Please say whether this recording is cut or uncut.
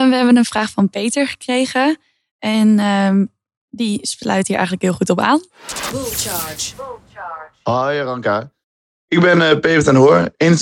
uncut